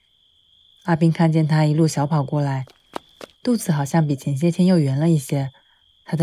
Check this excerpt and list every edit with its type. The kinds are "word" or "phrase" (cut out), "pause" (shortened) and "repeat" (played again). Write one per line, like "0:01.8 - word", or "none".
0:03.3 - pause

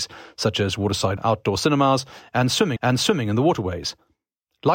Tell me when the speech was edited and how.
0:01.2 - word
0:02.8 - repeat

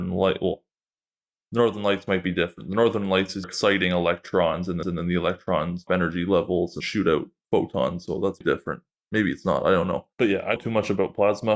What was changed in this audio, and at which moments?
0:03.4 - word
0:04.8 - repeat
0:05.9 - word
0:06.8 - word
0:08.4 - word
0:10.1 - pause
0:10.6 - phrase

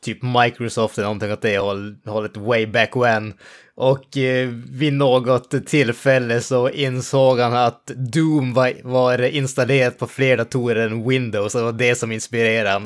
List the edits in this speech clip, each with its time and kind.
none

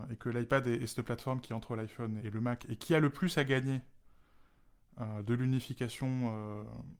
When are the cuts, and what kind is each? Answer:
0:02.2 - word

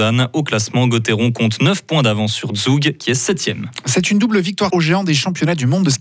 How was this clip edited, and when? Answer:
0:04.7 - word

